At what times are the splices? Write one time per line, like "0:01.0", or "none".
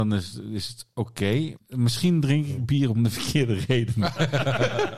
0:01.6